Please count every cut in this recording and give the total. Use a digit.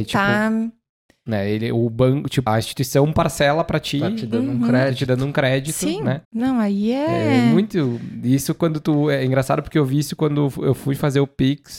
2